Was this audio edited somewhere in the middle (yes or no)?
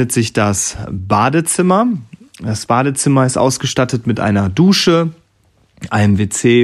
no